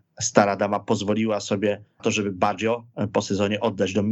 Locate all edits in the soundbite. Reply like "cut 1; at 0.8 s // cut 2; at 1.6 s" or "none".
cut 1; at 2.0 s